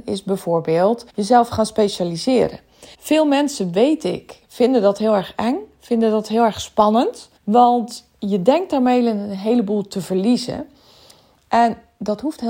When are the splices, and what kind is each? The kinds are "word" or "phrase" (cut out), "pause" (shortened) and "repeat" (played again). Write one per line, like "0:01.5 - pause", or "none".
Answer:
0:01.1 - pause
0:02.9 - pause
0:07.4 - pause